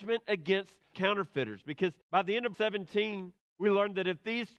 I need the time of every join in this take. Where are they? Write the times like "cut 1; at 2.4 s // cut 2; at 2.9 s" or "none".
cut 1; at 0.9 s // cut 2; at 2.0 s // cut 3; at 2.5 s